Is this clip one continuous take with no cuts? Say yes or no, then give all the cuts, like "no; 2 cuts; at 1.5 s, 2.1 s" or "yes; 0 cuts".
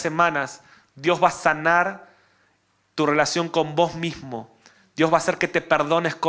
yes; 0 cuts